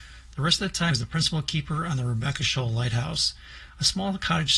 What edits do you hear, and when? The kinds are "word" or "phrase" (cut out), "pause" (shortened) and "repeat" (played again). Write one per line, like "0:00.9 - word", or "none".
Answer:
0:00.9 - word